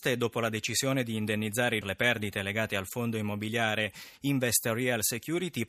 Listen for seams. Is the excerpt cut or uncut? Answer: cut